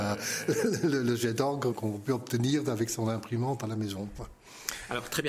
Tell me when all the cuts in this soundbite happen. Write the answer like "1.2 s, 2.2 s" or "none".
1.7 s